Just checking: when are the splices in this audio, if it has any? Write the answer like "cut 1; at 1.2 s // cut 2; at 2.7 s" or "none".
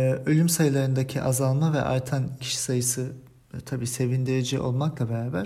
cut 1; at 2.4 s